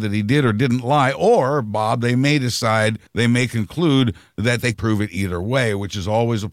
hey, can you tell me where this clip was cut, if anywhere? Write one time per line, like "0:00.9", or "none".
0:03.1
0:04.7